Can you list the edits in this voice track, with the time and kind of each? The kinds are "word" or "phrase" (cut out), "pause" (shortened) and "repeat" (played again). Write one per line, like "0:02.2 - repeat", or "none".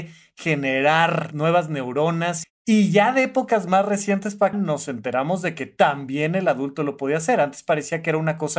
0:01.3 - word
0:02.4 - phrase
0:04.5 - word